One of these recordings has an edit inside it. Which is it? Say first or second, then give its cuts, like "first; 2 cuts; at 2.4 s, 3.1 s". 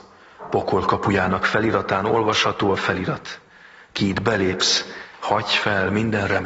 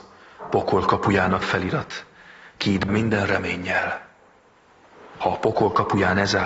second; 2 cuts; at 1.4 s, 2.9 s